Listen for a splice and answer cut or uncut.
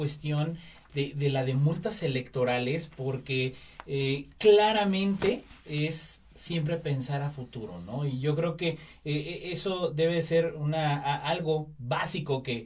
uncut